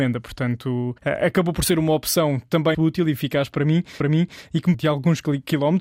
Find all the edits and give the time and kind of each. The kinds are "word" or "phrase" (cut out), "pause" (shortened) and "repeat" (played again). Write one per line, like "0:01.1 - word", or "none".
0:01.0 - pause
0:02.7 - word
0:04.0 - repeat
0:04.7 - phrase